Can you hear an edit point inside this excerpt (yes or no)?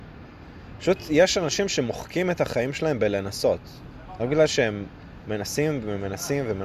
no